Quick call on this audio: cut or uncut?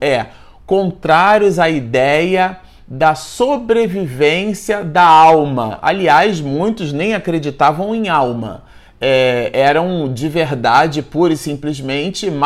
uncut